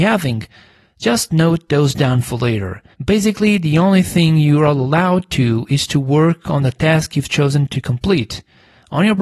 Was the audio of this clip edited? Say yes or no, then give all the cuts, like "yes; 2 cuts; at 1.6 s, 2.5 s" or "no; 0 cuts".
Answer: yes; 1 cut; at 2.9 s